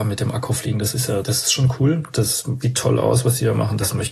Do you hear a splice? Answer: yes; 2 cuts; at 1.2 s, 2.6 s

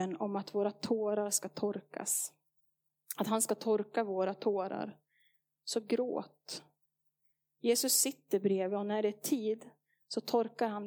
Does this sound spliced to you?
no; 0 cuts

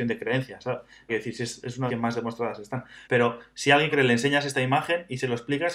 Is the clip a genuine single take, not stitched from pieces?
no; 4 cuts; at 1.1 s, 1.9 s, 3.0 s, 3.9 s

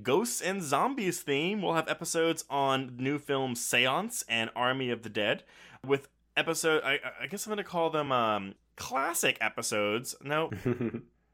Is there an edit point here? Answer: no; 0 cuts

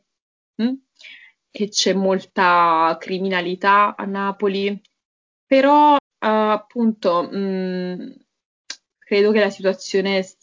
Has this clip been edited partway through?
yes; 3 cuts; at 1.6 s, 6.0 s, 8.9 s

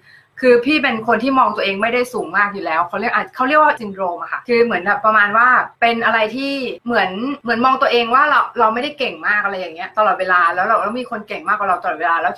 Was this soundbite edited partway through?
yes; 1 cut; at 3.8 s

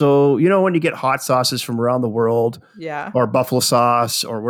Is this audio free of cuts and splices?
yes; 0 cuts

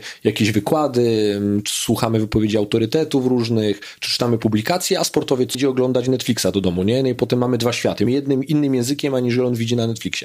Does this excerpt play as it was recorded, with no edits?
no; 2 cuts; at 5.5 s, 8.1 s

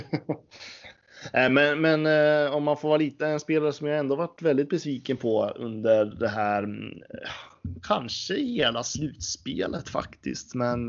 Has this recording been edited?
no; 0 cuts

